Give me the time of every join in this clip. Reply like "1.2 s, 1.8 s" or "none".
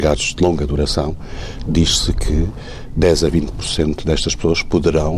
none